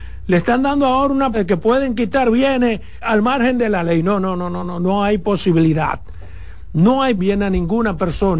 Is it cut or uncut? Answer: cut